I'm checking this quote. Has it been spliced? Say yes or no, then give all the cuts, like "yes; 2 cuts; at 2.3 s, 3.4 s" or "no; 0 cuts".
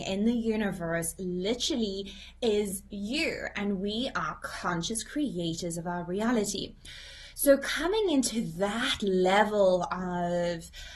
no; 0 cuts